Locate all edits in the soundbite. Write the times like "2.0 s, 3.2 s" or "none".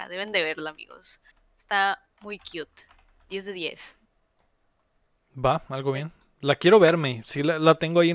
none